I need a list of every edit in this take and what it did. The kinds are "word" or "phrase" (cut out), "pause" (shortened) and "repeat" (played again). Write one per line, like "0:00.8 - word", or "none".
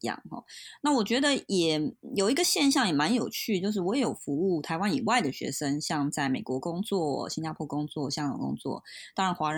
none